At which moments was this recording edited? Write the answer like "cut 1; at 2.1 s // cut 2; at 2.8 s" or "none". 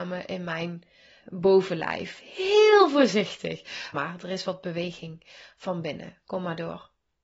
cut 1; at 1.2 s // cut 2; at 3.9 s